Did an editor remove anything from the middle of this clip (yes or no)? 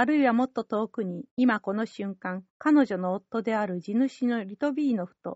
yes